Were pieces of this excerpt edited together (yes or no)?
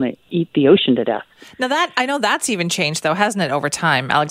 no